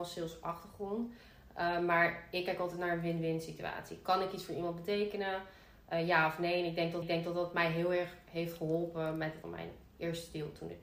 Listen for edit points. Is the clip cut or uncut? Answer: cut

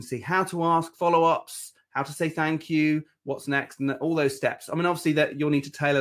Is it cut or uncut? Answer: uncut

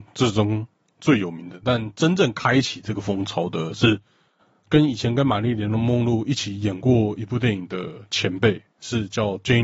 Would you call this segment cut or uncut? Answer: uncut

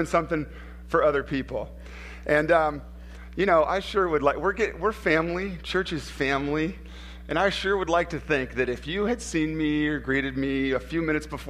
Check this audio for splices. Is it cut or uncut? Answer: uncut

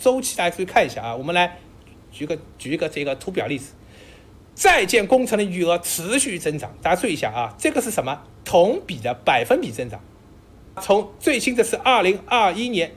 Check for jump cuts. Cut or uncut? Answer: cut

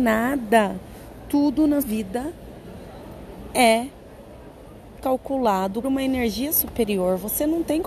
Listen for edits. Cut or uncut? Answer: cut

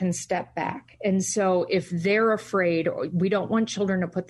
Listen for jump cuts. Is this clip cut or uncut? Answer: uncut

